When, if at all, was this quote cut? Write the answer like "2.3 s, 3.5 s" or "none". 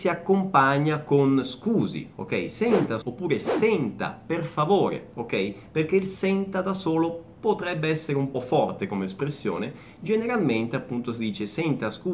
3.0 s, 8.3 s

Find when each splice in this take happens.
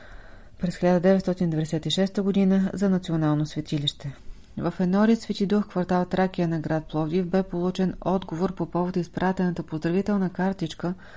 none

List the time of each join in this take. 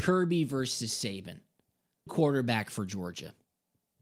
2.1 s

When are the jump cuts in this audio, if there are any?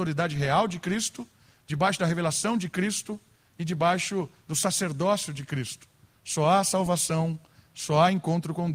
none

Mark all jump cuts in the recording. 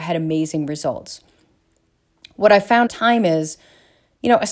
2.9 s

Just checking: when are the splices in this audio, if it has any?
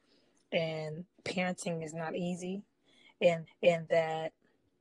3.5 s

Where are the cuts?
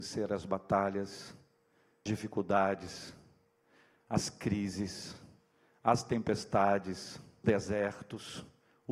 2.1 s, 7.4 s

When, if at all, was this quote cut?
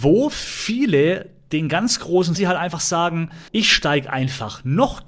2.4 s, 3.5 s

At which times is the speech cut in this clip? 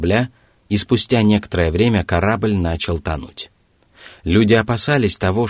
none

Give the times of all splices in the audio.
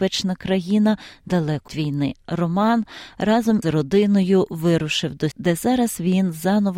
1.7 s, 3.6 s, 5.3 s

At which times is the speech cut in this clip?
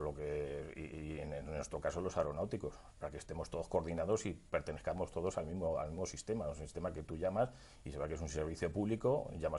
none

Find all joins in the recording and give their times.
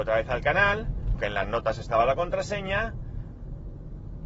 1.2 s

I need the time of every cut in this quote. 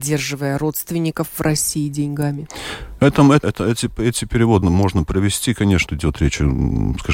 3.4 s, 4.6 s, 5.9 s

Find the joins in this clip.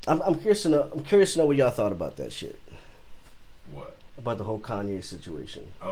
none

